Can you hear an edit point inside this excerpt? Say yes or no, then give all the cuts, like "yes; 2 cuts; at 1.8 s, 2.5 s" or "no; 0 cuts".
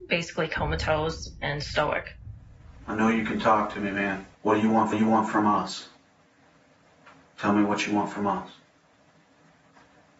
yes; 2 cuts; at 4.3 s, 4.9 s